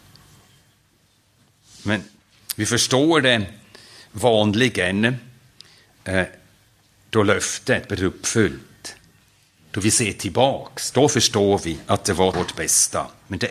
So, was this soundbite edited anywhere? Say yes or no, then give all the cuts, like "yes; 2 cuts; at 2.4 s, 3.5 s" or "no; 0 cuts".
yes; 1 cut; at 12.3 s